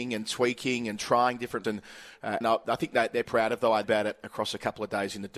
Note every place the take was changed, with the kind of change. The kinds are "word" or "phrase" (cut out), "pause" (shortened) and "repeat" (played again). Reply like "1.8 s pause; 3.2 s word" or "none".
1.6 s word; 2.4 s word; 3.2 s word; 3.8 s word